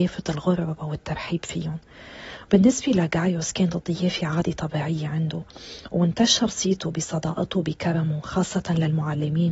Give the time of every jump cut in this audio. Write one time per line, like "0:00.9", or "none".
none